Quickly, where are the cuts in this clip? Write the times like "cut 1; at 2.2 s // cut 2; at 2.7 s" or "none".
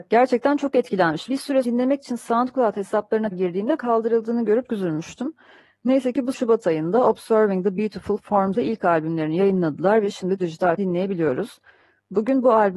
cut 1; at 1.3 s // cut 2; at 1.6 s // cut 3; at 3.3 s // cut 4; at 3.8 s // cut 5; at 4.7 s // cut 6; at 6.3 s // cut 7; at 8.5 s // cut 8; at 10.4 s // cut 9; at 10.8 s